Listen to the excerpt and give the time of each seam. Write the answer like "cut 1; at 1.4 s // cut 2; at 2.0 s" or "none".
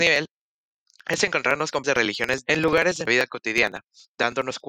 cut 1; at 1.8 s // cut 2; at 2.5 s // cut 3; at 3.1 s